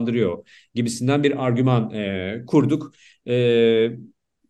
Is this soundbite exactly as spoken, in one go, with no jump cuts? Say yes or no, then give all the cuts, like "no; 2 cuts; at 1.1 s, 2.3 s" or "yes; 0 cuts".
yes; 0 cuts